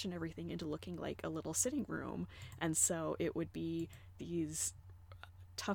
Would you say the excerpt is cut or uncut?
uncut